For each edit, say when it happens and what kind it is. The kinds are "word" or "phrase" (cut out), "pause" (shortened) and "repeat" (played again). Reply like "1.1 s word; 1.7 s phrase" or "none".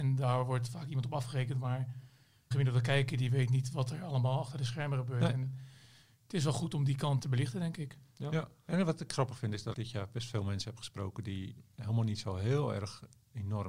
2.5 s word; 7.2 s word; 9.7 s word